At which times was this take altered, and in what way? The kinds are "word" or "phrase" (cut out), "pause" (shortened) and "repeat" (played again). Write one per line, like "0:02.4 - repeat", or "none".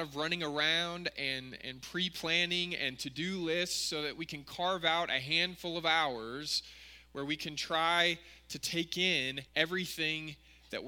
0:09.5 - pause